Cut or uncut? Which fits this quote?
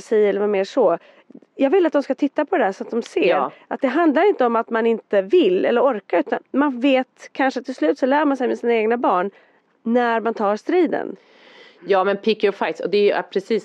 uncut